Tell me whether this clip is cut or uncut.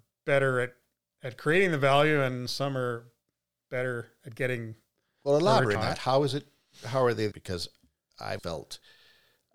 cut